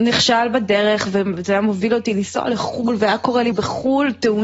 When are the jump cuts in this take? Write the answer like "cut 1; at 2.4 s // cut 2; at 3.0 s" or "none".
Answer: cut 1; at 3.5 s

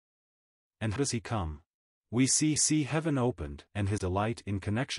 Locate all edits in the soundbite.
cut 1; at 1.0 s // cut 2; at 1.9 s // cut 3; at 2.6 s // cut 4; at 3.7 s // cut 5; at 4.0 s

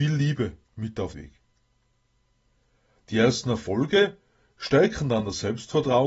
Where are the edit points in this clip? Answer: cut 1; at 1.1 s

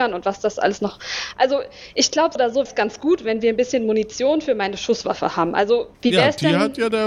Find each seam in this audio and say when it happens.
cut 1; at 2.4 s // cut 2; at 2.7 s // cut 3; at 5.9 s

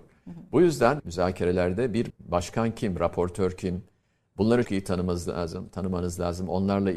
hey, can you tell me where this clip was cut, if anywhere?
cut 1; at 1.0 s // cut 2; at 2.1 s // cut 3; at 4.6 s

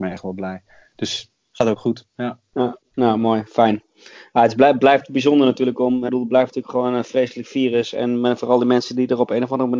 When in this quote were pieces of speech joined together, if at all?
cut 1; at 6.1 s

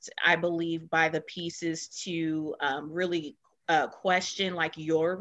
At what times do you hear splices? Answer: none

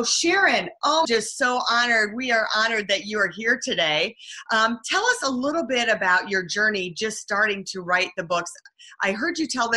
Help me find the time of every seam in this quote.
cut 1; at 1.0 s

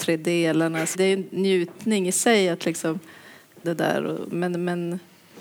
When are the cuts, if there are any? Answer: cut 1; at 0.9 s // cut 2; at 3.6 s

